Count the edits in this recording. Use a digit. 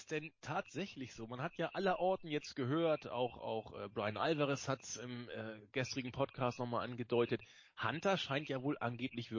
0